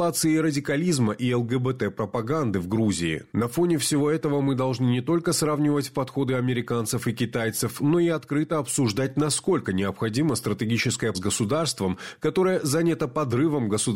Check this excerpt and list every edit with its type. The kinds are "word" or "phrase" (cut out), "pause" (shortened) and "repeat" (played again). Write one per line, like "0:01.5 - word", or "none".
0:11.1 - word